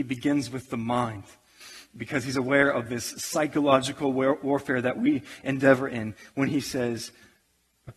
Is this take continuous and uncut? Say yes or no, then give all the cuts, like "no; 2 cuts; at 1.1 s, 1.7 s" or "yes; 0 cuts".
yes; 0 cuts